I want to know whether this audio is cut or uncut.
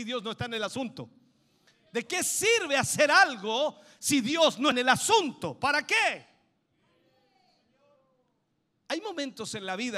cut